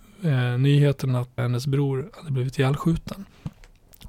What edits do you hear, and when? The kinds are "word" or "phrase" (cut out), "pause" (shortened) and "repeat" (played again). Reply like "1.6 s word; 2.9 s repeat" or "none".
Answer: 1.4 s word

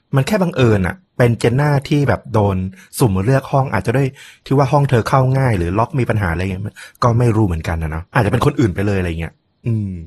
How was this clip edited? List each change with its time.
1.1 s pause; 8.1 s pause

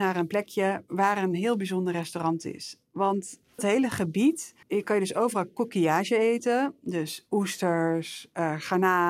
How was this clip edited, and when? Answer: 3.6 s phrase; 4.6 s pause

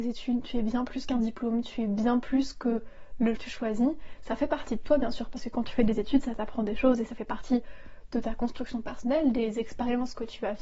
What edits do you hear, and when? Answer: 3.4 s phrase

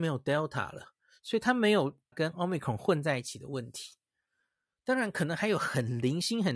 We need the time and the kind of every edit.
2.1 s word

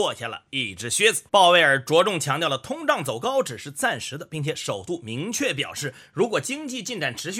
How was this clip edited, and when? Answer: 1.3 s pause

